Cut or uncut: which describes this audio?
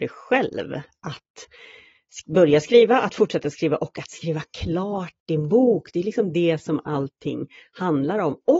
uncut